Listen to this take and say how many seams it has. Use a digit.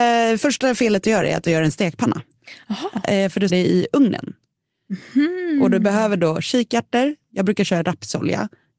1